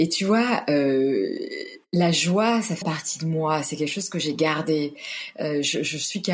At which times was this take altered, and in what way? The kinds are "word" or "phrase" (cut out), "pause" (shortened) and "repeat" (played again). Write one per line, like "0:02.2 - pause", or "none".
0:01.9 - pause
0:02.8 - word